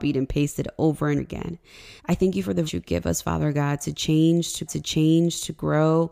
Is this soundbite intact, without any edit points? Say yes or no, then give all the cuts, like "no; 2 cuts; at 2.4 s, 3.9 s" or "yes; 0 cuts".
no; 4 cuts; at 1.2 s, 2.0 s, 2.7 s, 4.7 s